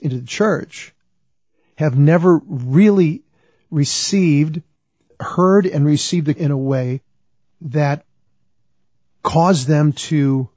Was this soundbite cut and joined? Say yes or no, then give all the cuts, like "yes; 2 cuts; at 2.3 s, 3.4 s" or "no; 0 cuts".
yes; 1 cut; at 6.4 s